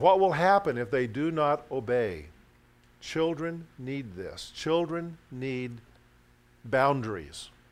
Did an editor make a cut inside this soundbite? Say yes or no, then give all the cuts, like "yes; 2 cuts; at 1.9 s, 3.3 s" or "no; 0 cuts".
no; 0 cuts